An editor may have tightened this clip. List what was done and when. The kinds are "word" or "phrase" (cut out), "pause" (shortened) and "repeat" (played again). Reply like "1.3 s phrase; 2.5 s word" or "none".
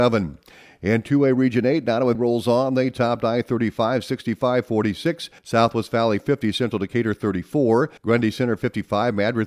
2.1 s word; 5.4 s pause; 8.0 s pause